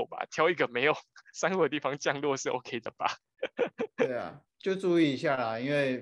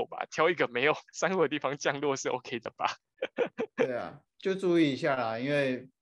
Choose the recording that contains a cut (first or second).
second